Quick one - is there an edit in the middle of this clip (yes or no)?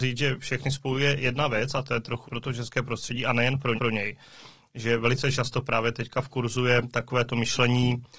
yes